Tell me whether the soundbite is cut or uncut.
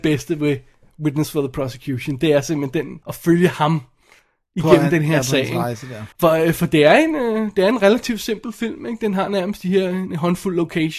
cut